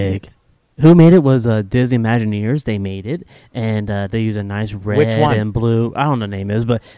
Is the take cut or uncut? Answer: uncut